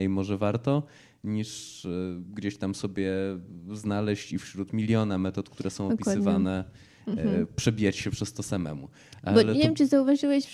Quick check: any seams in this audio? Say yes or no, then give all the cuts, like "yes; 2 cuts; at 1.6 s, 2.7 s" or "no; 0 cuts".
no; 0 cuts